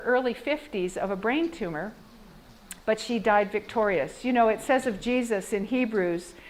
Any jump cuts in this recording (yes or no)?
yes